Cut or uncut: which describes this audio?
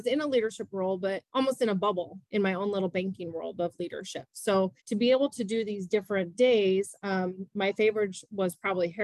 cut